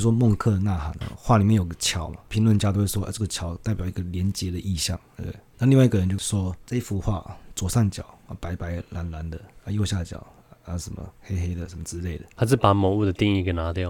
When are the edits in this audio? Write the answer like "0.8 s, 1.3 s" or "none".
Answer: none